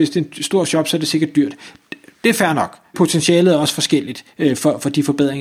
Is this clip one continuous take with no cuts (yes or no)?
no